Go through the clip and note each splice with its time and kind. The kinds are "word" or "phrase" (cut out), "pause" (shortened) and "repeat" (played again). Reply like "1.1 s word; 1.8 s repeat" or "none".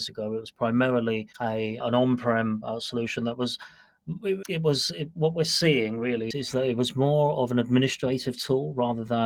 1.3 s pause